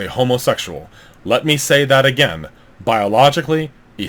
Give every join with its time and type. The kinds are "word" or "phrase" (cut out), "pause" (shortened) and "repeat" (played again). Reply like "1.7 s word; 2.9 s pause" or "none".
none